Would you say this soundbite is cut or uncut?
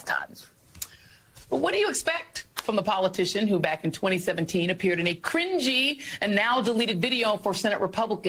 uncut